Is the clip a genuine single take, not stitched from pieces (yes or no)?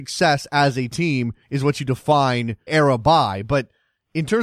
no